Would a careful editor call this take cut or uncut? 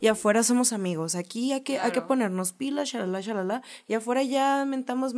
uncut